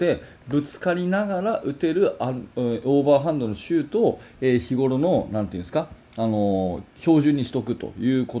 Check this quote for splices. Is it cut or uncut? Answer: cut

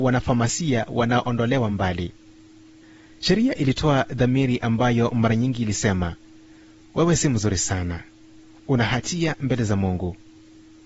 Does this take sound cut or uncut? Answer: uncut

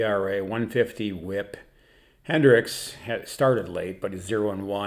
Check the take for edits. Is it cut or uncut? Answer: uncut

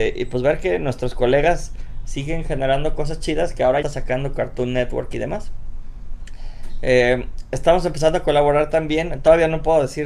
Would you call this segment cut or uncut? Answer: cut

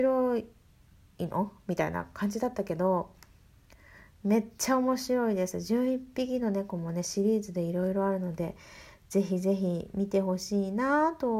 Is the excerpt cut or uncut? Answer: uncut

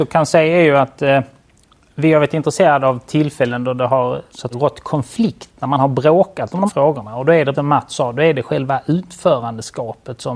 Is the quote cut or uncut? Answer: cut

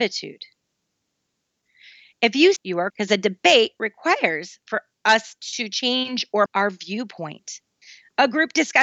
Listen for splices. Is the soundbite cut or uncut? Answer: cut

